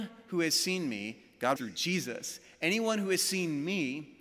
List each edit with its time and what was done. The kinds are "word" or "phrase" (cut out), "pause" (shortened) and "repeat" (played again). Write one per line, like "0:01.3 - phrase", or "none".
0:01.6 - phrase